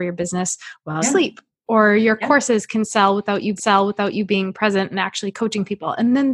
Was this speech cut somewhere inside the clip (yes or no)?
yes